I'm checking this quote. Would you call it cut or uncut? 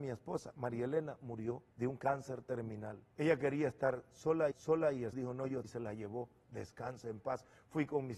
cut